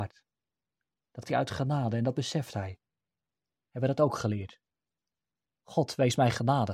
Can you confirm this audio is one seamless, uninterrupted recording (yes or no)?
no